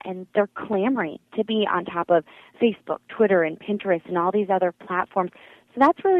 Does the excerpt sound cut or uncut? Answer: uncut